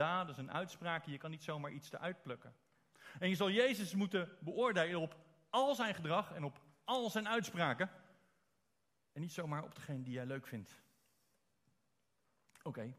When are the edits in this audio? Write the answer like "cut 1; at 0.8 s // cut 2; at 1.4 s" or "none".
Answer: none